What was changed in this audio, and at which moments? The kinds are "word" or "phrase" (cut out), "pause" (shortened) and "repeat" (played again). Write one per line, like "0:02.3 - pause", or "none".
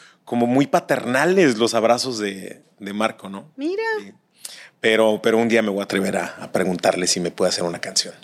none